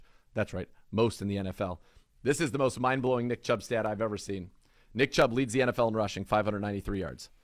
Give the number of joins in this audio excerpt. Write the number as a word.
zero